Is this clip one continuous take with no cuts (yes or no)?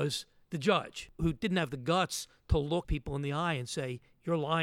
no